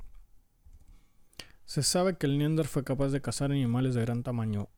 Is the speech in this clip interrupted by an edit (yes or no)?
no